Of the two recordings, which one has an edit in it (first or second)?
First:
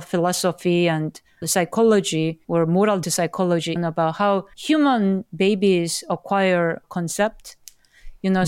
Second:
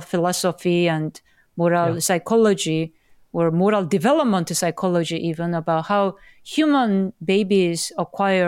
first